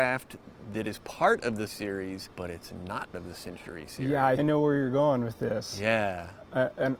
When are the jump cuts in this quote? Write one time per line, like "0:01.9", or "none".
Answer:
0:01.7
0:02.3
0:03.1
0:04.4